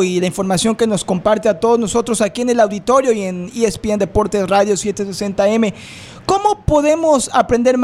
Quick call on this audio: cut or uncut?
uncut